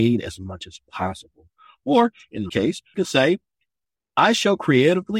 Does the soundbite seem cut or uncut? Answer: cut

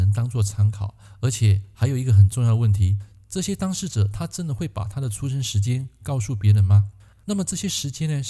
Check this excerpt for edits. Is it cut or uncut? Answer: uncut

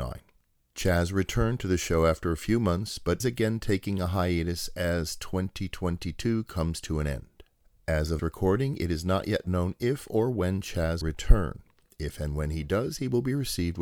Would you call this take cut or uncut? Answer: cut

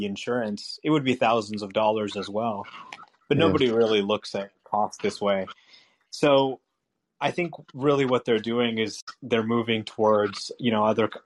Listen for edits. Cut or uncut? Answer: uncut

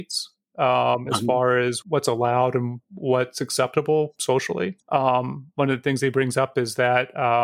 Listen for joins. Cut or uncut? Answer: cut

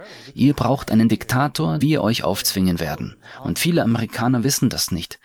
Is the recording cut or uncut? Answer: cut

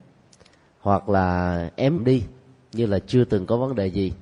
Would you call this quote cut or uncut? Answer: cut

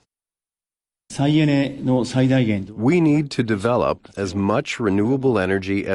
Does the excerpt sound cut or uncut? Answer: uncut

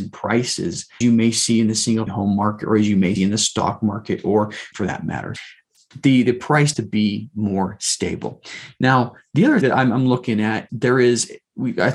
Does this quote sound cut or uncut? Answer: cut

